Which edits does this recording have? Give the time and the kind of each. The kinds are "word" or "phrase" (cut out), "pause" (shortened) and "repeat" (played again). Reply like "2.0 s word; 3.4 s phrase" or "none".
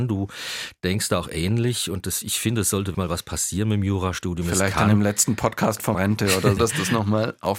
2.9 s word; 5.9 s word; 6.6 s word